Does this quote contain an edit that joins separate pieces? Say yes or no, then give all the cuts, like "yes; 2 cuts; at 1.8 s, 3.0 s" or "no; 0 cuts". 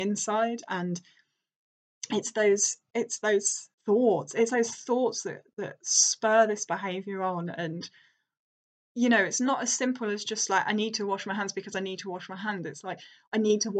yes; 1 cut; at 3.8 s